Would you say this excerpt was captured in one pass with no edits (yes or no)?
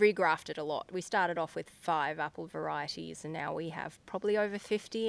yes